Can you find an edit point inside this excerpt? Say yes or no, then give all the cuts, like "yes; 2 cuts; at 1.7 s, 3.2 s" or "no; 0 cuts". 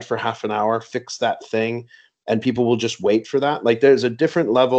no; 0 cuts